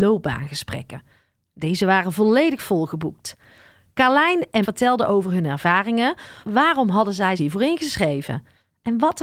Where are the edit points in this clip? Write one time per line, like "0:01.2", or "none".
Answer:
0:04.6
0:06.4
0:07.4